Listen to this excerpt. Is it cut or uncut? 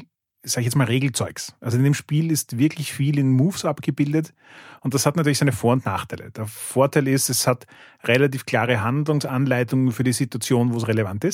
uncut